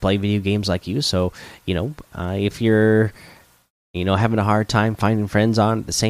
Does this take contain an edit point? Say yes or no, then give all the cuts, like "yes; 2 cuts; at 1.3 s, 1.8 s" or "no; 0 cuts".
no; 0 cuts